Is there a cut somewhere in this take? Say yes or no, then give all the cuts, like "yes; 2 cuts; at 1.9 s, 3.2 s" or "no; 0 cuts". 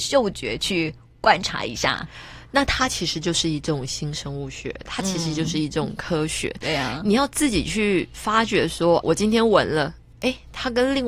yes; 1 cut; at 9.0 s